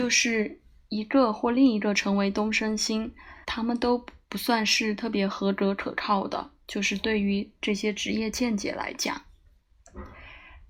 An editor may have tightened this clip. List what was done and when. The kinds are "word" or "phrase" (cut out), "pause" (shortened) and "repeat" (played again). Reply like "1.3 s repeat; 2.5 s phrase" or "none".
3.4 s pause

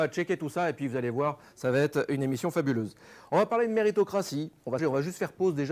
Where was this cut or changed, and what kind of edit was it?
4.8 s word

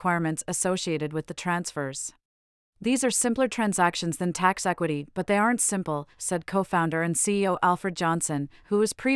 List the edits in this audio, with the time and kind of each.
2.3 s pause

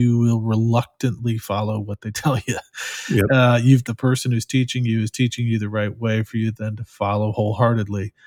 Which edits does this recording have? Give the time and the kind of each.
3.8 s phrase

